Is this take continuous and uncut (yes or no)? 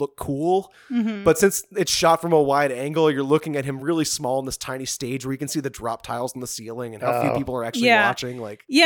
yes